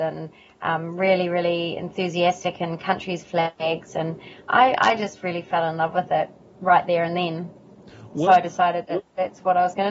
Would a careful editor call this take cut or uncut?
uncut